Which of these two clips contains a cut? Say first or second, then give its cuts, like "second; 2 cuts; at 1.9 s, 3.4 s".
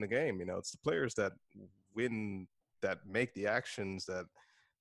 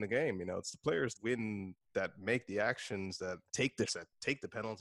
second; 4 cuts; at 1.1 s, 1.8 s, 3.5 s, 3.9 s